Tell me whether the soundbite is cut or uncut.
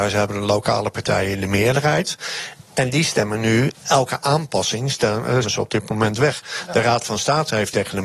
cut